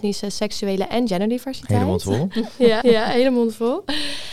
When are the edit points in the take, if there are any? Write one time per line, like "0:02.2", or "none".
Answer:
0:02.8